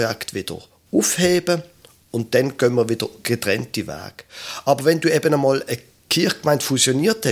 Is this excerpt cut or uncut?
uncut